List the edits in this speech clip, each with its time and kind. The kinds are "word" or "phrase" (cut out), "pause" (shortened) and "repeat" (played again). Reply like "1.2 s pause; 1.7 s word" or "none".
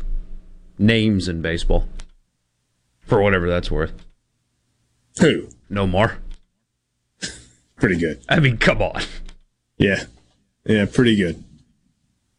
none